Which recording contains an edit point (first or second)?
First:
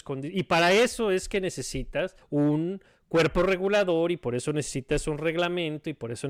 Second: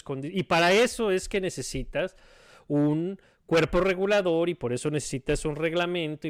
first